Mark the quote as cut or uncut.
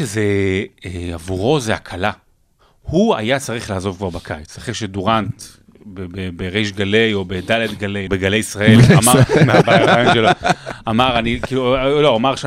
cut